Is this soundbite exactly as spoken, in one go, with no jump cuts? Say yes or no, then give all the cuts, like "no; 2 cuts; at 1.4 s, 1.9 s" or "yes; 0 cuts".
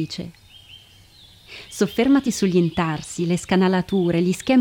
yes; 0 cuts